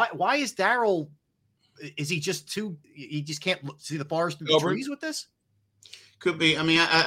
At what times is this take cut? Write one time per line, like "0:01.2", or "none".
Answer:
0:02.8